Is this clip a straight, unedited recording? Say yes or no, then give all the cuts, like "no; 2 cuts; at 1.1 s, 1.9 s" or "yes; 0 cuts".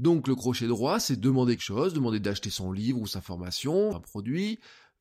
no; 2 cuts; at 1.6 s, 3.9 s